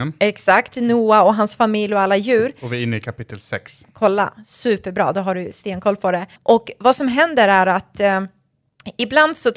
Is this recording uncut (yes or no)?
no